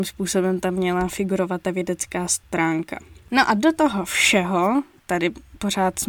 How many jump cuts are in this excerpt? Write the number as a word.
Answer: zero